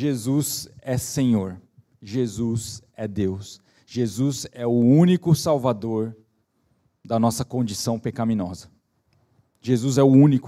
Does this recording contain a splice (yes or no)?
no